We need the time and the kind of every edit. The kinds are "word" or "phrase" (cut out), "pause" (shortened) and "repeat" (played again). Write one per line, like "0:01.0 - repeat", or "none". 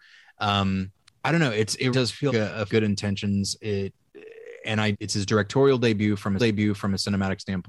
0:01.0 - pause
0:01.9 - word
0:02.3 - word
0:02.7 - phrase
0:04.9 - phrase
0:06.4 - repeat